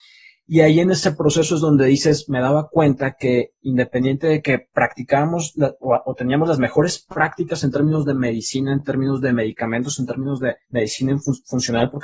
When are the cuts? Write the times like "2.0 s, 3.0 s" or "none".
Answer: 10.6 s